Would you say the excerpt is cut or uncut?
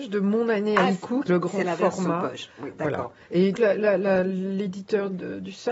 cut